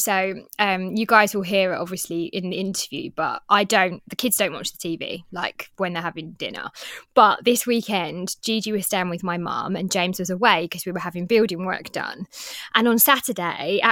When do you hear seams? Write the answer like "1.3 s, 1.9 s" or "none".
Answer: none